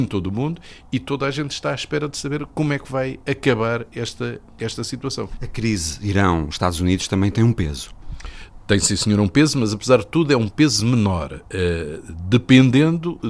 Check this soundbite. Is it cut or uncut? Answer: uncut